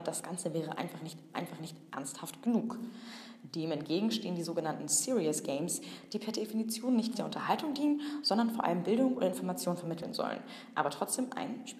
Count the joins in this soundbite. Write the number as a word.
two